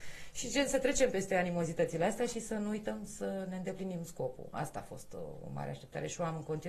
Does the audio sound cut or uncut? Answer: uncut